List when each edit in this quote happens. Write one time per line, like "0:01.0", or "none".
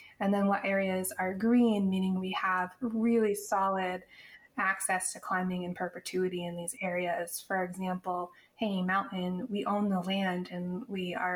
none